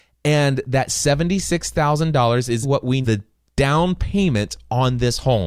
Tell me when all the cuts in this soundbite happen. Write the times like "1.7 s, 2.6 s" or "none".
2.6 s, 3.0 s